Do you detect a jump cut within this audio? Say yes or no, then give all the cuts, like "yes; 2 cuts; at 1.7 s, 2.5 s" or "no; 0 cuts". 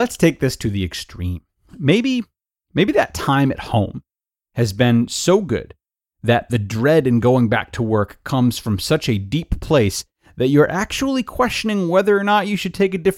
no; 0 cuts